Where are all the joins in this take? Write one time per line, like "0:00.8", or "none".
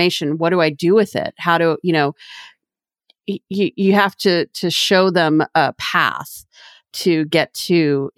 none